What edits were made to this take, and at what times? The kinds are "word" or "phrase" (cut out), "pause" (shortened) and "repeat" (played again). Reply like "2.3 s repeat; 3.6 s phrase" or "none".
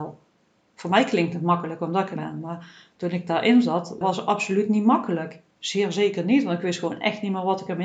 2.2 s word; 4.0 s phrase; 5.5 s pause

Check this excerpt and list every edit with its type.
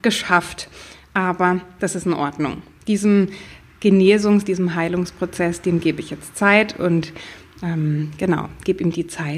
none

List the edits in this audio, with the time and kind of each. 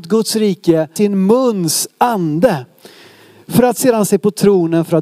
1.0 s word; 4.1 s word

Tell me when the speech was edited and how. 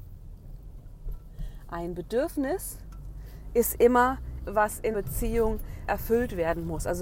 4.4 s word; 4.9 s word; 5.9 s word

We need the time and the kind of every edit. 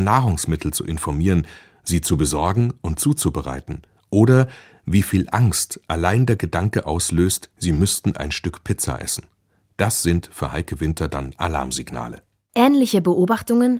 none

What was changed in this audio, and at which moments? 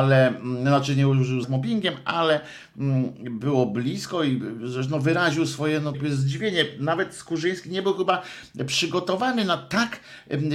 1.4 s word; 5.9 s word

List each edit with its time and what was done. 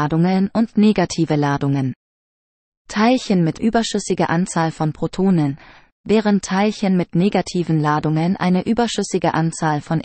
3.6 s phrase

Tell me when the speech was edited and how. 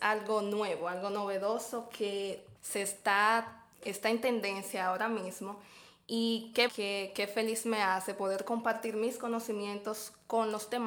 2.6 s pause; 3.7 s pause; 6.7 s word

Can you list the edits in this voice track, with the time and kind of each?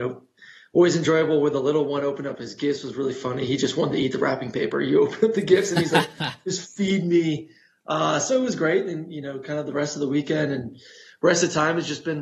none

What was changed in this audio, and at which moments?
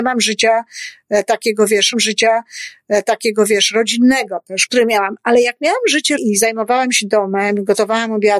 1.9 s repeat; 4.7 s word; 6.2 s word

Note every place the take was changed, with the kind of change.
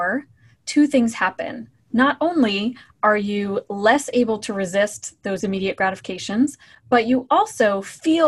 none

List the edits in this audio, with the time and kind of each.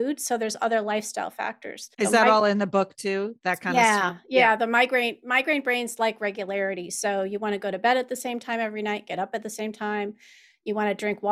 1.9 s pause

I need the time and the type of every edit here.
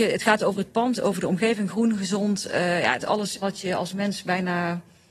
3.0 s phrase; 3.4 s word

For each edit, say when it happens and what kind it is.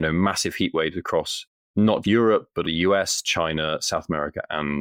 2.0 s word; 2.6 s word

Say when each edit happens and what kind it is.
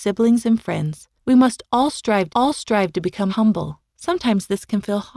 1.2 s pause; 2.3 s repeat; 3.3 s word; 3.9 s pause

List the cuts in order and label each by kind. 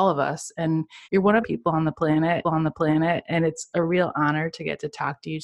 1.0 s pause; 1.4 s phrase; 2.4 s repeat

